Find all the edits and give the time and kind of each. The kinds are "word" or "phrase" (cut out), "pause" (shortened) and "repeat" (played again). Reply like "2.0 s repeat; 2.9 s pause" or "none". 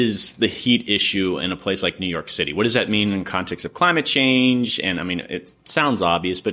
none